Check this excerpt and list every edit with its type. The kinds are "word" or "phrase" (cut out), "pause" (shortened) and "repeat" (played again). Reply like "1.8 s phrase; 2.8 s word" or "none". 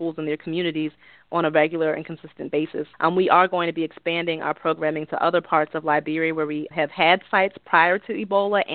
2.9 s pause; 6.7 s word

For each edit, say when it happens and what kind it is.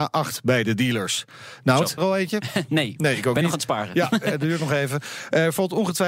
2.0 s phrase

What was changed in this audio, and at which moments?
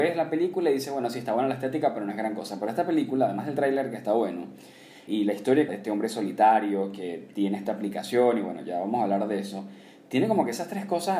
5.1 s word; 5.7 s phrase

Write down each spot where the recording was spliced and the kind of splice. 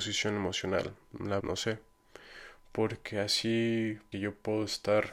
1.4 s word; 4.1 s word

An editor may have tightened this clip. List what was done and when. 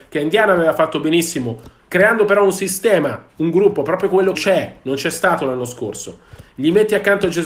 4.3 s phrase

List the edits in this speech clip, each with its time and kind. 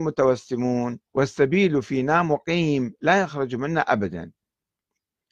1.1 s pause

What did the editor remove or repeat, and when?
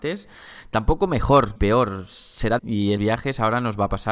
1.6 s word; 2.6 s word; 3.0 s word

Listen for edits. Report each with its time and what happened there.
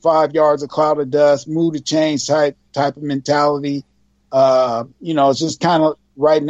none

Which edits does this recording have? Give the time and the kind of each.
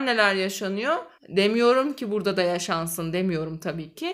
1.2 s pause

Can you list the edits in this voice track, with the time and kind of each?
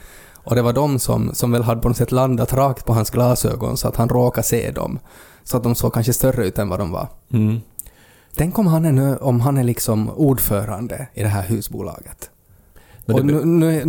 none

